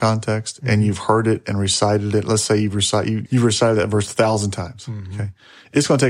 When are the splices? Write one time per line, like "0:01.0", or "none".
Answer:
0:03.3